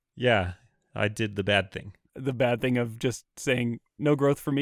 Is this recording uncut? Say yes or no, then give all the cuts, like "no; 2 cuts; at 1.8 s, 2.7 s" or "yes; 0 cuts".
yes; 0 cuts